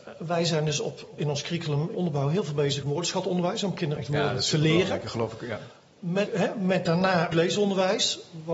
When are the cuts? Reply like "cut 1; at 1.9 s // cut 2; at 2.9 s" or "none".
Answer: cut 1; at 1.2 s // cut 2; at 1.9 s // cut 3; at 2.8 s // cut 4; at 4.0 s // cut 5; at 6.3 s // cut 6; at 7.3 s